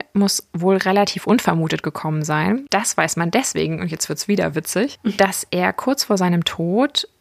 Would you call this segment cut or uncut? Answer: uncut